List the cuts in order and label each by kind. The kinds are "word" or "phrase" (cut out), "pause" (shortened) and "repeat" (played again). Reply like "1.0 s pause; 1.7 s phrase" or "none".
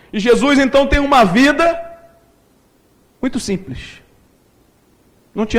none